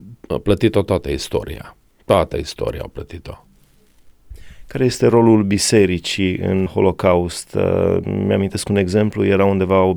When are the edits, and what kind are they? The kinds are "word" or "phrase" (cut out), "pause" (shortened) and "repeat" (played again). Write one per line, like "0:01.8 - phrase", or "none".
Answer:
0:06.7 - word